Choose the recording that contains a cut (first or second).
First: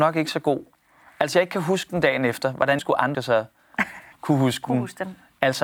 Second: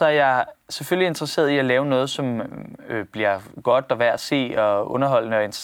first